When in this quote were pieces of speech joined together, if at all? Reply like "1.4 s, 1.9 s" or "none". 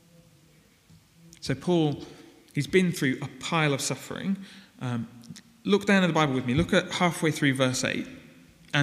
none

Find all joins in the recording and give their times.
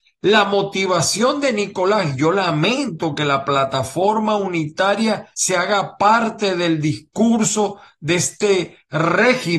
5.3 s

